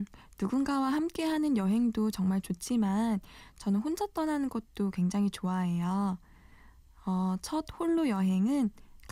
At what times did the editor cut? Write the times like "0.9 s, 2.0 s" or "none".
none